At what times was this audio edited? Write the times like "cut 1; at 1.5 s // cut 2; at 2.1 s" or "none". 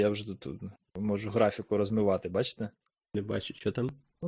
none